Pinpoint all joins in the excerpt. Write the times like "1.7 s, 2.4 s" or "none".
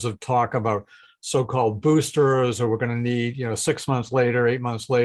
none